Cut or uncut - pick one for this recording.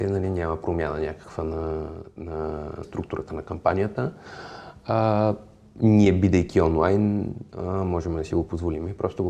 cut